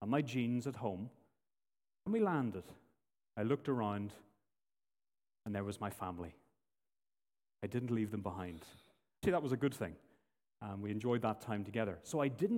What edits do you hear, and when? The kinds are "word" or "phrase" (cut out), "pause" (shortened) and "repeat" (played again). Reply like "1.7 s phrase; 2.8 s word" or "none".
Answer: 2.1 s word; 9.2 s word